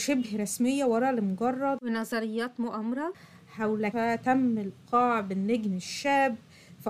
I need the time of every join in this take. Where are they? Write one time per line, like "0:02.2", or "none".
0:03.9